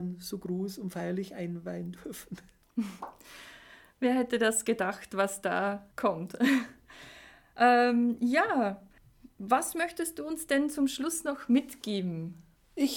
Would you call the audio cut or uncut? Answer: cut